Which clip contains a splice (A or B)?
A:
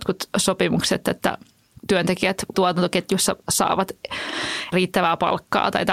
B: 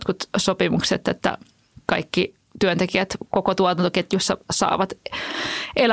A